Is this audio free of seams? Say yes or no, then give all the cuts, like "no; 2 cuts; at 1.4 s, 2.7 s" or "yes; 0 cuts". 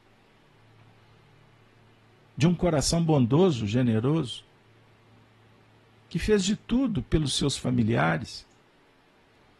yes; 0 cuts